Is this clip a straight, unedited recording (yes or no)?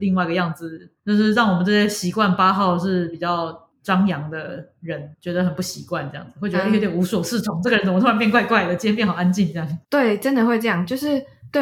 no